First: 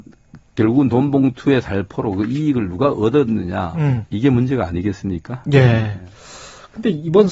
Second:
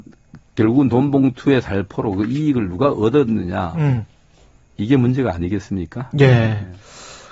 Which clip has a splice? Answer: first; 1 cut; at 4.1 s

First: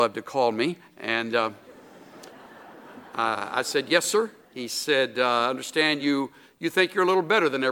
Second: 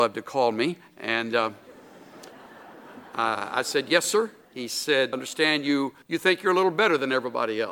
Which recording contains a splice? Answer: second; 2 cuts; at 5.1 s, 6.0 s

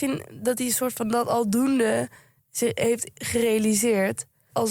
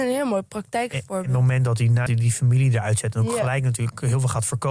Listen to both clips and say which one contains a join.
second; 1 cut; at 2.1 s

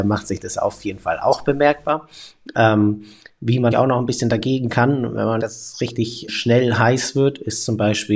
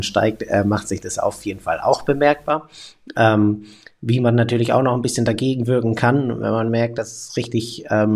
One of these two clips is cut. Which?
first; 4 cuts; at 3.7 s, 4.7 s, 5.4 s, 6.3 s

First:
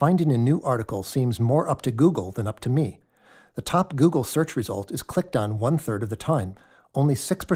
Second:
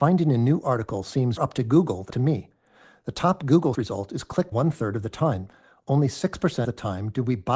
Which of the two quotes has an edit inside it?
second; 5 cuts; at 1.4 s, 2.1 s, 3.7 s, 4.5 s, 6.6 s

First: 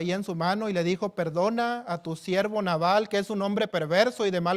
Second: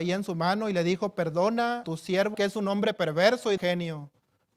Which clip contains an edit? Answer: second; 3 cuts; at 1.8 s, 2.3 s, 3.6 s

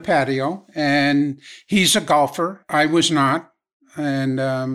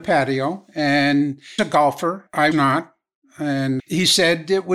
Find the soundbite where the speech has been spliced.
second; 3 cuts; at 1.6 s, 2.5 s, 3.8 s

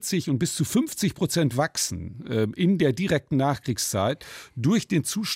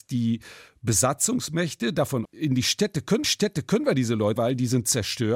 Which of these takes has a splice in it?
second; 3 cuts; at 2.2 s, 3.2 s, 4.4 s

